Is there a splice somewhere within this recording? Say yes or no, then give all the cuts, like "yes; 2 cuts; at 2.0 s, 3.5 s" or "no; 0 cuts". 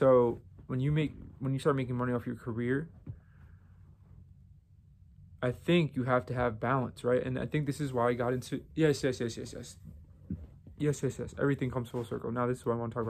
no; 0 cuts